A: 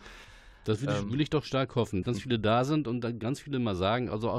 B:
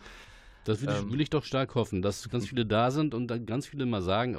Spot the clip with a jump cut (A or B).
A